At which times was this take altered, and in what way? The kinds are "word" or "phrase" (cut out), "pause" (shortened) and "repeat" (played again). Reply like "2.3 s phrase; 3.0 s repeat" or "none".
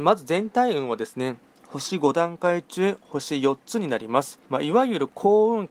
1.5 s pause; 4.5 s pause